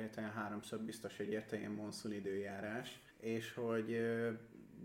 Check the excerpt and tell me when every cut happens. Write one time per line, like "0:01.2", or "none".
0:03.1